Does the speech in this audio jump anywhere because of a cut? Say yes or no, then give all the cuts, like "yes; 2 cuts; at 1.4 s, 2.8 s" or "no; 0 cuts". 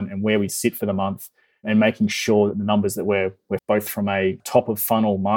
yes; 1 cut; at 3.6 s